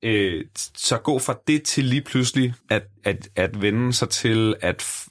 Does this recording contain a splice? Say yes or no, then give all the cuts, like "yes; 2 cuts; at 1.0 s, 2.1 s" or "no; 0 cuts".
yes; 1 cut; at 2.6 s